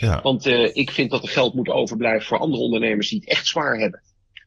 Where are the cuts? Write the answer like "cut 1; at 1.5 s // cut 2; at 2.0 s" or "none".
none